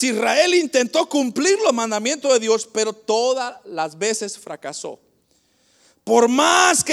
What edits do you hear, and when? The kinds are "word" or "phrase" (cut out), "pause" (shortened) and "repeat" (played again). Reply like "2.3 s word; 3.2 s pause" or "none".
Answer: none

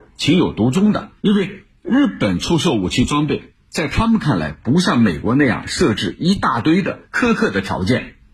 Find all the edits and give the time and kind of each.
1.2 s pause; 7.0 s pause

